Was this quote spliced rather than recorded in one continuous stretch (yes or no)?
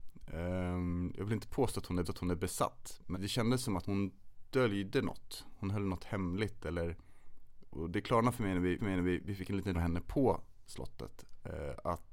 yes